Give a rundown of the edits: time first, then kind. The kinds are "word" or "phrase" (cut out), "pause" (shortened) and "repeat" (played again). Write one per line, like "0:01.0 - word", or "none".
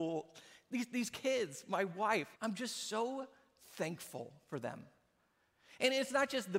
0:02.3 - pause